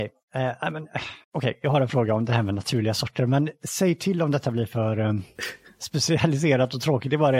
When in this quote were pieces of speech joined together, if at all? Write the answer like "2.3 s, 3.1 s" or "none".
1.2 s